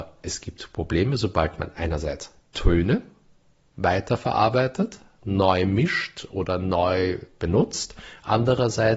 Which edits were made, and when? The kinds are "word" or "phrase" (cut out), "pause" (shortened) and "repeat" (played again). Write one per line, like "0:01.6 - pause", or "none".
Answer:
none